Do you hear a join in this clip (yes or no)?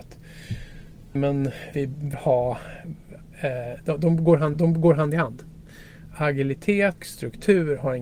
yes